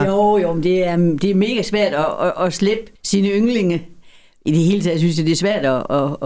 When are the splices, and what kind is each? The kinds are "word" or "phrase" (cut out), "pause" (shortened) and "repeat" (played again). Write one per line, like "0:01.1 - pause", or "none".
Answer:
0:03.0 - pause